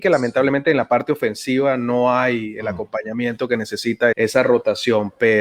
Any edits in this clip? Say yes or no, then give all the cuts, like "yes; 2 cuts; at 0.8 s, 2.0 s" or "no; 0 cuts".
yes; 1 cut; at 4.1 s